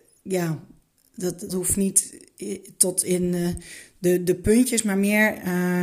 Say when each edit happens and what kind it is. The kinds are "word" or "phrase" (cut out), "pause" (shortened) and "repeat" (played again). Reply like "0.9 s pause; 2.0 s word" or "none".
1.5 s word

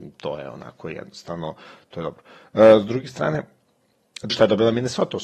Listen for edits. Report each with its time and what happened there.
4.3 s word

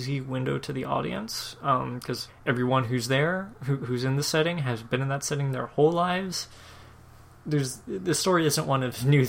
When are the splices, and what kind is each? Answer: 2.3 s word

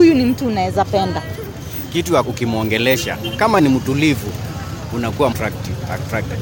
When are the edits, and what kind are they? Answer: 2.2 s word; 3.6 s word; 5.3 s word

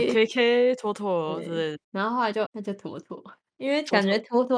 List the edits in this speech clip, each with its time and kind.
1.8 s pause; 2.5 s word

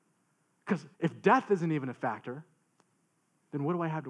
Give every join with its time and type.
0.9 s pause

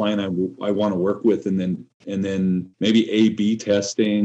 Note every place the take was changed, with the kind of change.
2.7 s pause

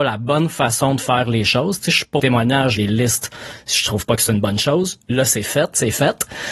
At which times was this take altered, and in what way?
2.2 s word; 2.8 s word

